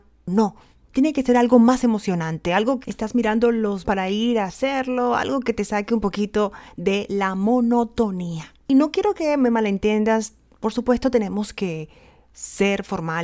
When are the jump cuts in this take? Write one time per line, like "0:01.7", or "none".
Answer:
0:02.8
0:03.8